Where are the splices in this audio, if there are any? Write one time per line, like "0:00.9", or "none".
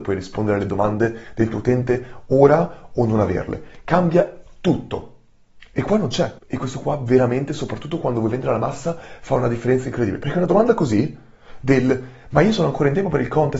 0:06.4